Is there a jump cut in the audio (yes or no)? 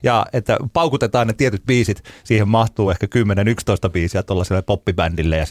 no